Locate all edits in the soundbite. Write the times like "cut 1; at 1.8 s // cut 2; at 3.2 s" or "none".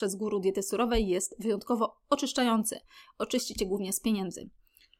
none